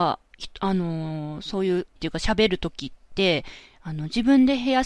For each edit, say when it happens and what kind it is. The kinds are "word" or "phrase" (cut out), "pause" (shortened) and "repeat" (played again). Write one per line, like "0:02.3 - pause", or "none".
0:02.0 - word